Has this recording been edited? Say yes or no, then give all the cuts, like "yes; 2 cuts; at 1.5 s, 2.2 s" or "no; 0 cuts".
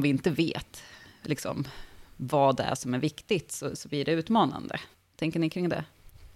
no; 0 cuts